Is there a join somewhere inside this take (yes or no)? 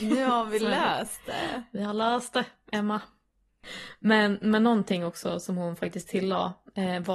no